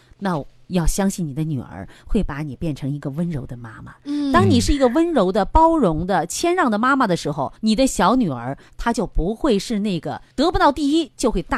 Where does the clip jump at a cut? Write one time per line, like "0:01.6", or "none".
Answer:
0:07.6
0:10.3